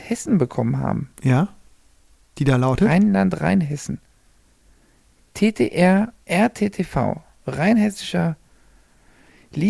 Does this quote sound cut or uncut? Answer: cut